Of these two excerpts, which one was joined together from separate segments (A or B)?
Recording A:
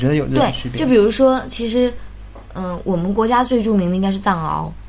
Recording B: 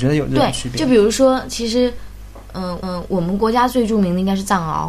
B